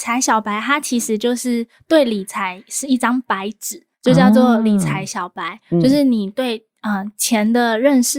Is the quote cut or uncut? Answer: cut